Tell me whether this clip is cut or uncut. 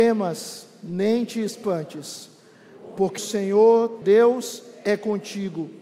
cut